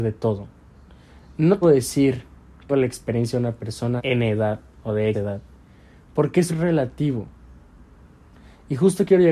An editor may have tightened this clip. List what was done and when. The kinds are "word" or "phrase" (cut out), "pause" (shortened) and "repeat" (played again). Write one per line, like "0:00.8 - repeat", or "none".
0:01.6 - word
0:02.7 - word
0:04.0 - word
0:05.1 - word
0:06.5 - word